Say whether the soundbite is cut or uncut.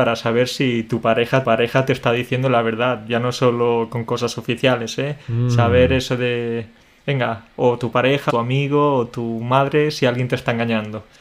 cut